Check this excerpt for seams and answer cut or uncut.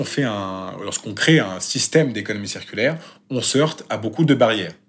uncut